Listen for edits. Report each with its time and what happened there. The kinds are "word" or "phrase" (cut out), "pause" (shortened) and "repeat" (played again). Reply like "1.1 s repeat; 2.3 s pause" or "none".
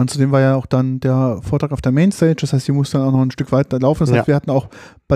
none